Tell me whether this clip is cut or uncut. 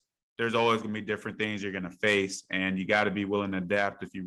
uncut